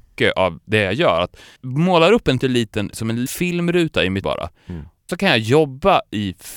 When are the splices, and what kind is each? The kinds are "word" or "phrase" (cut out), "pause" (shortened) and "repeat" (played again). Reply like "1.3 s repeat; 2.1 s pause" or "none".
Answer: 1.6 s word; 2.4 s word; 2.9 s word; 3.3 s word; 4.2 s word; 5.1 s word